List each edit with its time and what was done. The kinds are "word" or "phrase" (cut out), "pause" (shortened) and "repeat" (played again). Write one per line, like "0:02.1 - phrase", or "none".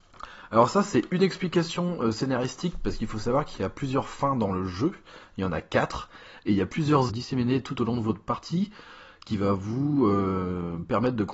0:07.1 - phrase